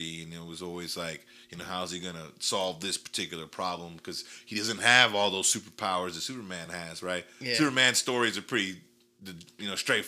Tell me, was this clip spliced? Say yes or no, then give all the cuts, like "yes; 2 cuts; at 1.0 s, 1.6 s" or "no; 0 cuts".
no; 0 cuts